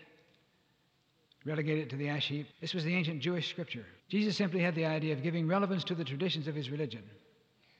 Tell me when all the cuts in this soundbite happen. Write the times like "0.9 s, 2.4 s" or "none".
2.5 s, 4.0 s